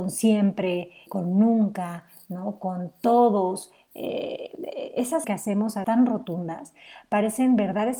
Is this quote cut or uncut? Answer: cut